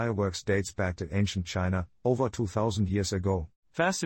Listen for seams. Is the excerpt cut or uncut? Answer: uncut